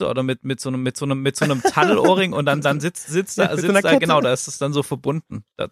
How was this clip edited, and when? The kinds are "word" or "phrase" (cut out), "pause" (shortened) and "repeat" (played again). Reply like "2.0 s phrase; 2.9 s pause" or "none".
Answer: 2.6 s repeat